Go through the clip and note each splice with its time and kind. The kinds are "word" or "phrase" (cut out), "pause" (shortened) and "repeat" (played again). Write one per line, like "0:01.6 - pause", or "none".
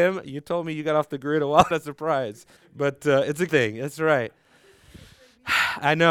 0:01.7 - phrase
0:02.6 - pause
0:03.5 - word

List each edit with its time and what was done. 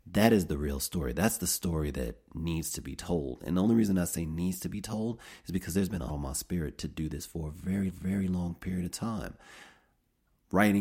0:06.1 - word
0:07.9 - repeat

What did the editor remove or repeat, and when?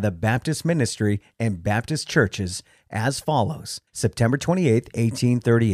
0:03.9 - pause

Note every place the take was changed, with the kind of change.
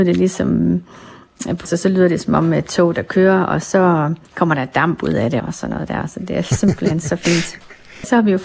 0:01.7 - phrase
0:04.2 - pause
0:05.4 - word

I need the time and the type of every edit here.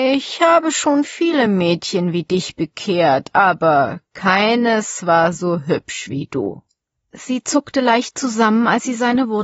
none

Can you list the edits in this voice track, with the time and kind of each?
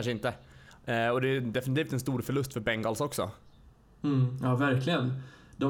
none

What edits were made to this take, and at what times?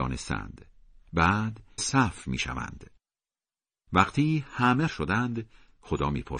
0:01.8 - word
0:04.9 - word

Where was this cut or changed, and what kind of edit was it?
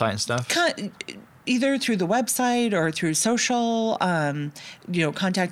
none

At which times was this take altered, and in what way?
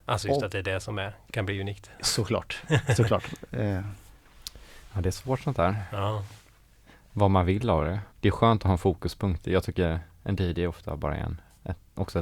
0:08.1 - pause

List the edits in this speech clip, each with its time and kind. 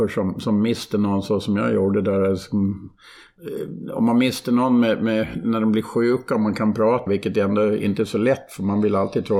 0:07.1 - phrase

